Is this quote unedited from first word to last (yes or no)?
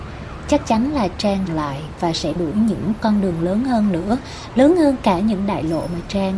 no